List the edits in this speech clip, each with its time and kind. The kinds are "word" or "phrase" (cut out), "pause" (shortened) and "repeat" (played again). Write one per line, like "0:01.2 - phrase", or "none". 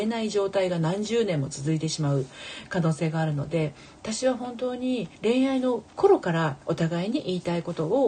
0:05.2 - pause
0:06.6 - pause